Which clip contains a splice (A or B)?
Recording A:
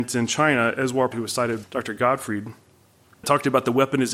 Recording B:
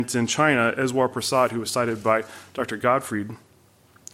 A